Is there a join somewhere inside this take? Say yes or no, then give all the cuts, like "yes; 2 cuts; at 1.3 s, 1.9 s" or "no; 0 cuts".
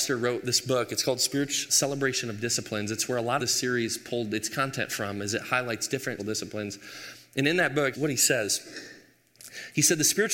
yes; 4 cuts; at 1.7 s, 3.4 s, 6.2 s, 7.9 s